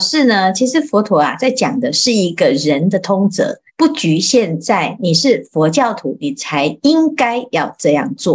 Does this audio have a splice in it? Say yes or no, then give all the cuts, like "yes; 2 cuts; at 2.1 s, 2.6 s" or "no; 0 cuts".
yes; 1 cut; at 3.7 s